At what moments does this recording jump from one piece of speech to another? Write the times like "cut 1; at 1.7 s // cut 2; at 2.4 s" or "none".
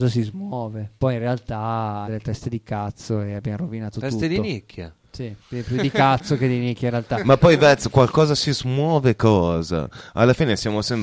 cut 1; at 1.0 s // cut 2; at 2.0 s // cut 3; at 5.4 s